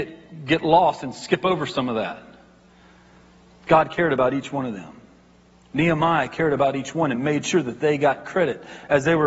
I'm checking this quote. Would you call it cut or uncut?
uncut